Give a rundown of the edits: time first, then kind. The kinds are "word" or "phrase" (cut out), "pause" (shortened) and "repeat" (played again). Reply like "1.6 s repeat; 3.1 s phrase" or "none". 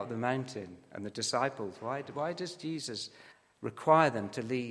3.3 s pause